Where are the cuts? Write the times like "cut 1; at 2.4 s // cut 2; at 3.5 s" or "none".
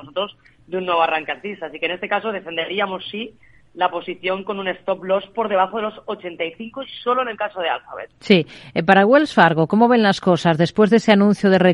none